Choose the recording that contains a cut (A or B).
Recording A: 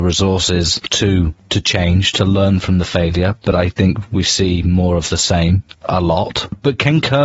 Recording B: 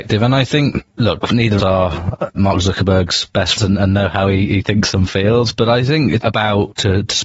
B